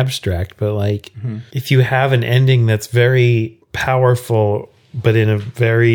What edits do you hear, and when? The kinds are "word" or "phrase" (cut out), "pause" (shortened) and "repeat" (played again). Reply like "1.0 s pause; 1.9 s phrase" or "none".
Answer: 3.6 s pause